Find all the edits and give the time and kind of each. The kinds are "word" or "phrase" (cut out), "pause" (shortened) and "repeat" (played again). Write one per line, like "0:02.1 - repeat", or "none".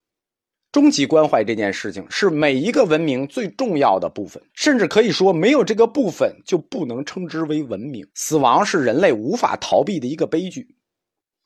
0:04.5 - pause
0:08.1 - pause